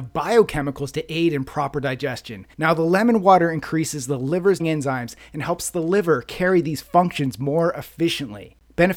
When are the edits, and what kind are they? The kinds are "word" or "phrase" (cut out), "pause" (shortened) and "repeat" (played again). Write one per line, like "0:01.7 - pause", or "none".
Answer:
0:02.5 - pause
0:04.6 - word